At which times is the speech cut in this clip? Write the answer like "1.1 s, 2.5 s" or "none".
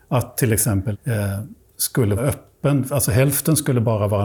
0.9 s, 2.2 s